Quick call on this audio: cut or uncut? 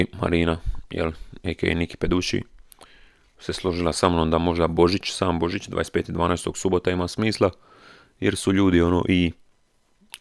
uncut